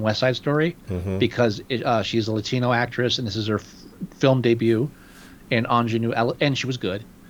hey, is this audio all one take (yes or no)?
yes